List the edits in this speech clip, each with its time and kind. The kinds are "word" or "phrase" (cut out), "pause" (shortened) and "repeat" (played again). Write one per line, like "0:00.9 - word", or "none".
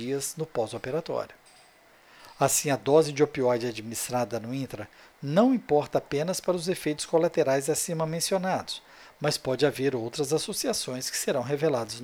none